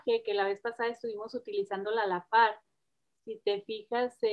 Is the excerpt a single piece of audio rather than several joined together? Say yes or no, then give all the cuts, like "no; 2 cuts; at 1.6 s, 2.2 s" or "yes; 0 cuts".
yes; 0 cuts